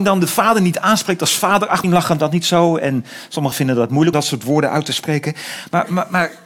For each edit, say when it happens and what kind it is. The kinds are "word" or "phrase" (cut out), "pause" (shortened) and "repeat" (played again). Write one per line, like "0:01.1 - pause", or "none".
0:01.8 - word
0:03.5 - word
0:04.1 - word